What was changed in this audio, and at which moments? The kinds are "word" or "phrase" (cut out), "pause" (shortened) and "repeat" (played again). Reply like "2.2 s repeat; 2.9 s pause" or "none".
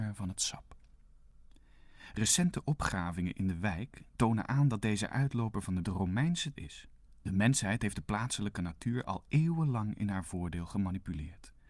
4.1 s pause; 5.8 s phrase; 6.6 s phrase; 7.1 s pause

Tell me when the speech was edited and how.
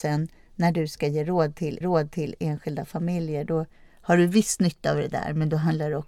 1.8 s repeat

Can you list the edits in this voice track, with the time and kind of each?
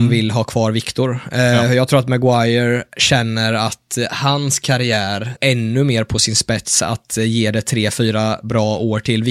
5.4 s word

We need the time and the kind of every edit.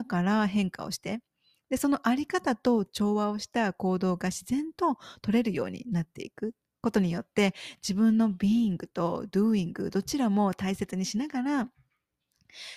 none

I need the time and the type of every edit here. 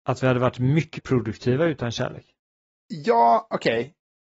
1.0 s word

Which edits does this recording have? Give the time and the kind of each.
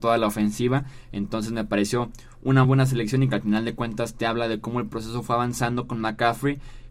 2.6 s word

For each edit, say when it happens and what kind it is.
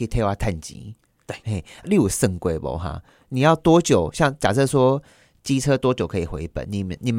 none

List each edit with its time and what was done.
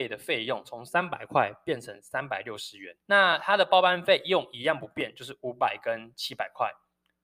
3.0 s pause

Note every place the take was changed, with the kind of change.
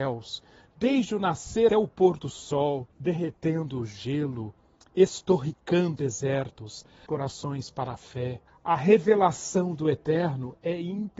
1.7 s word; 2.9 s pause; 6.0 s word; 7.1 s phrase; 8.5 s pause

